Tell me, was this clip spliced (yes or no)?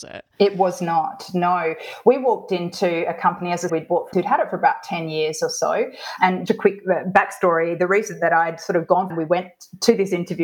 yes